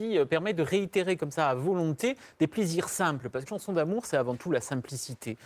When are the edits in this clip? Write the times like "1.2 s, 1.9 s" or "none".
3.5 s